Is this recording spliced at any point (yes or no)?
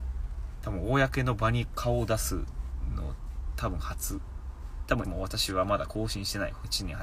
yes